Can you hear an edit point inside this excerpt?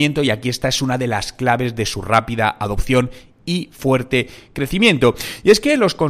no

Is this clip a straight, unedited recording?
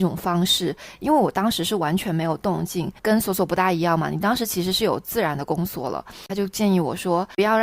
no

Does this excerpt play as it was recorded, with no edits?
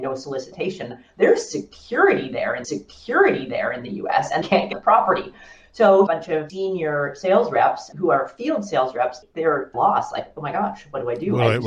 no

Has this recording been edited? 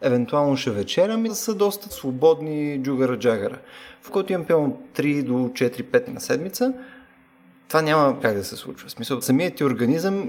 yes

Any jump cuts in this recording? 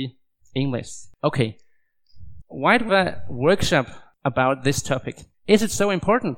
yes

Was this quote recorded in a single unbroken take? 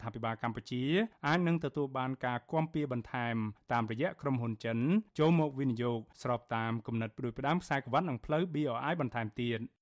yes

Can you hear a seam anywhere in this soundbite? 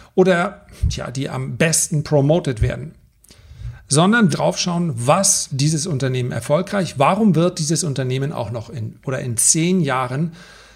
yes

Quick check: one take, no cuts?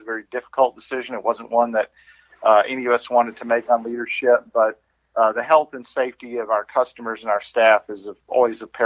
yes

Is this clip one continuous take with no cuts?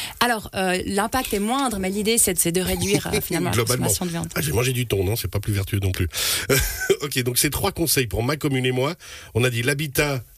no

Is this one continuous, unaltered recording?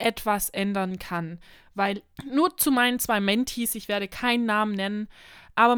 no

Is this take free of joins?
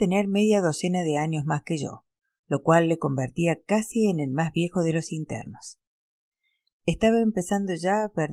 yes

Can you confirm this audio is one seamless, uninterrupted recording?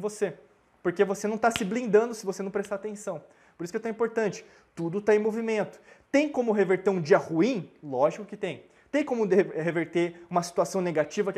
yes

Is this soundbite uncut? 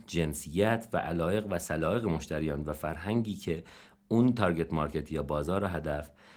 yes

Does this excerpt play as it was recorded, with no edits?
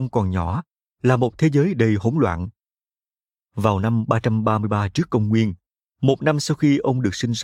yes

